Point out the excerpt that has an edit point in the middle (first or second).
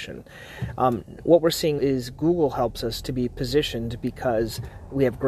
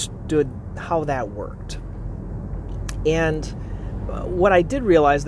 first